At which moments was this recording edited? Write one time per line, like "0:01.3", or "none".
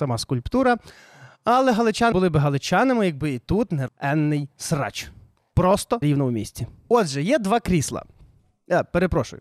0:02.1
0:03.9
0:06.0